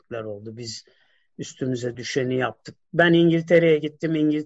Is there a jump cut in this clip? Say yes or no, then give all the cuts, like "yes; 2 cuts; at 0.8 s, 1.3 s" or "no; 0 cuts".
no; 0 cuts